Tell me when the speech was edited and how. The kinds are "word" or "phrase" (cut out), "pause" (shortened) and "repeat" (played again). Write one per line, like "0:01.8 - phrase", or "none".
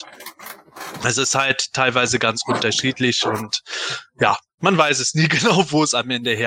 none

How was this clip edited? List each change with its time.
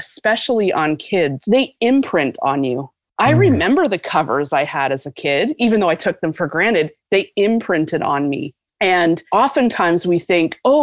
none

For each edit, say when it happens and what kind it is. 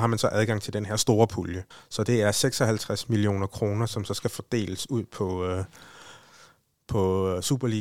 0:01.7 - pause

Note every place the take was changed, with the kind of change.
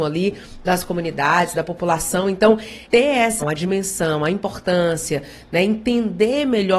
0:02.9 - word
0:03.4 - word

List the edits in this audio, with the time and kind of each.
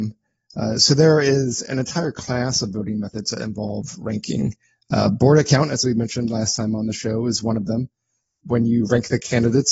none

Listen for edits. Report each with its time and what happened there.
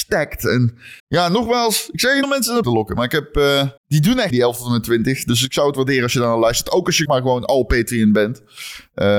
0:01.0 - pause
0:02.2 - word
0:02.6 - word
0:03.8 - pause
0:04.3 - word
0:07.1 - word

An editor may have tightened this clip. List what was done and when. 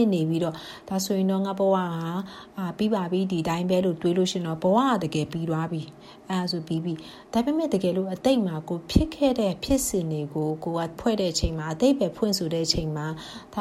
0:11.0 - word

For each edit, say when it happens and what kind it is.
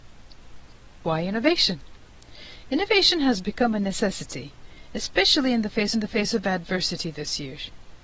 0:05.9 - repeat

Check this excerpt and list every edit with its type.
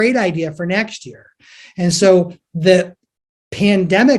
none

